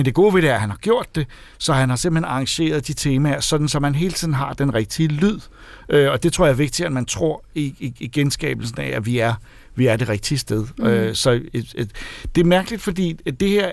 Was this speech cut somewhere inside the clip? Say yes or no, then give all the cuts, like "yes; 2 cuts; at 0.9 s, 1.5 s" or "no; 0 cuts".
no; 0 cuts